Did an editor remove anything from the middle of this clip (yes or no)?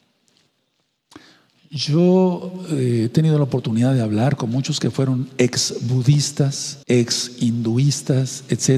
yes